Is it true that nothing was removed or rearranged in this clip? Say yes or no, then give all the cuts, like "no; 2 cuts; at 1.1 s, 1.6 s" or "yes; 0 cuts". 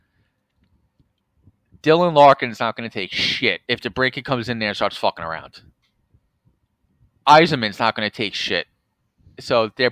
no; 1 cut; at 3.6 s